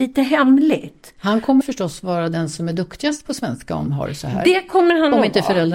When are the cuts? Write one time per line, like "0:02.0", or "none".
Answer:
0:01.6
0:03.9